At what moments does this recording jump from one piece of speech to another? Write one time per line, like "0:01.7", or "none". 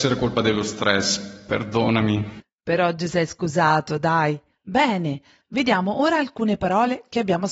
none